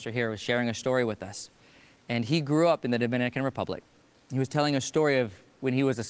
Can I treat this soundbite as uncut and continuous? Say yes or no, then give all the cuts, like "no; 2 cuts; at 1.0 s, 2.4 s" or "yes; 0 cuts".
yes; 0 cuts